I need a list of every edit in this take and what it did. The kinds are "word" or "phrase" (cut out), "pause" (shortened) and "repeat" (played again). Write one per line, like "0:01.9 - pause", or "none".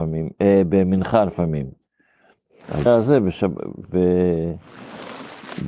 0:02.9 - word